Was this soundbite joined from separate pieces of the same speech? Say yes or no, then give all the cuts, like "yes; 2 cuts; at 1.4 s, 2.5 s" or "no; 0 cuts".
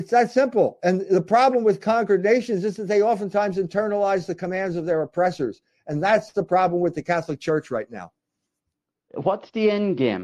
no; 0 cuts